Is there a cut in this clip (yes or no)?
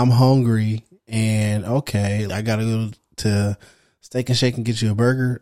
yes